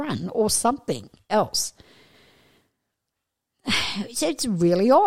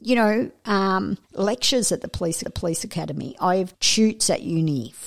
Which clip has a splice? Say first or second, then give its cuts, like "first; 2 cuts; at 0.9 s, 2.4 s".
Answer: second; 3 cuts; at 1.2 s, 2.4 s, 3.7 s